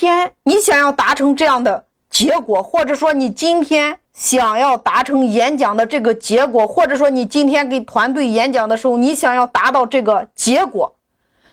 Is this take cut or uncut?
cut